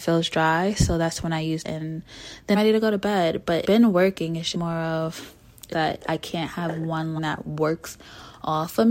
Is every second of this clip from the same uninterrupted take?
no; 6 cuts; at 1.6 s, 2.5 s, 3.6 s, 4.5 s, 5.7 s, 7.2 s

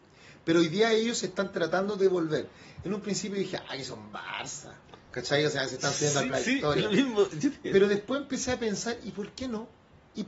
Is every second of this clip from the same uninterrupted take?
no; 1 cut; at 6.3 s

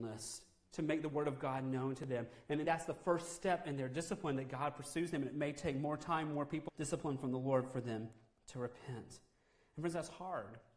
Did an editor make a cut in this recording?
yes; 2 cuts; at 2.6 s, 6.7 s

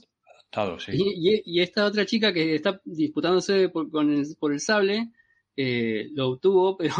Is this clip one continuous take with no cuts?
yes; 0 cuts

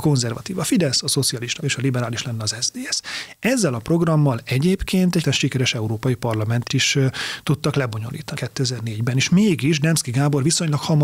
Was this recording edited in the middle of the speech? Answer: yes; 4 cuts; at 1.6 s, 5.2 s, 6.7 s, 8.4 s

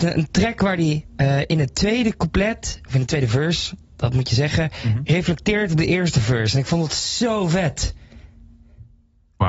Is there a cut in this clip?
no; 0 cuts

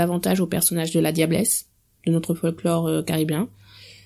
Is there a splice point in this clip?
no; 0 cuts

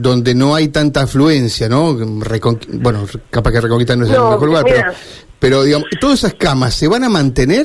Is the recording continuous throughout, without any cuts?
yes; 0 cuts

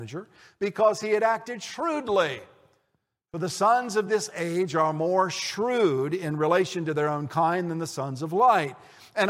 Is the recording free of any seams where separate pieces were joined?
yes; 0 cuts

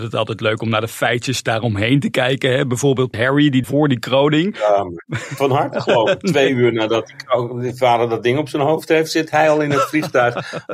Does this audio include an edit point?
yes; 3 cuts; at 3.1 s, 3.6 s, 5.4 s

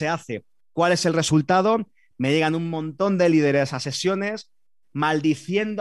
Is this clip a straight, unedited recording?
yes; 0 cuts

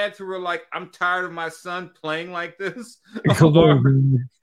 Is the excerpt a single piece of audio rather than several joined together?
yes; 0 cuts

